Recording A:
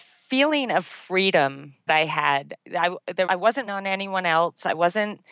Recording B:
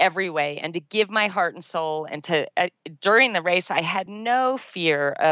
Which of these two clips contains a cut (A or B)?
A